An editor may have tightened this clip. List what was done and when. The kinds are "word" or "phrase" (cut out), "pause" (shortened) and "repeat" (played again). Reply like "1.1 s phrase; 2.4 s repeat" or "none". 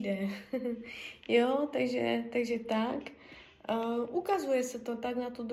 none